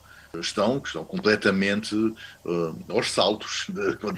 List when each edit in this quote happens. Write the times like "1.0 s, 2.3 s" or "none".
none